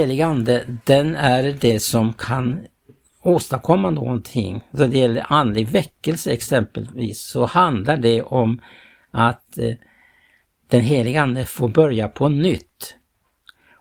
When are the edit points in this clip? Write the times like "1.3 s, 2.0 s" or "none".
none